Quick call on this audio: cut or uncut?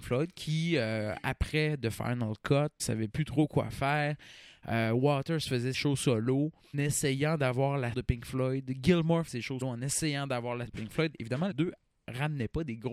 cut